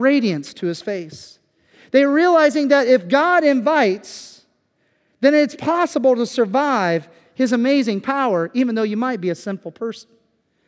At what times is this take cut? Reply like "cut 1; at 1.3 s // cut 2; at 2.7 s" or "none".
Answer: none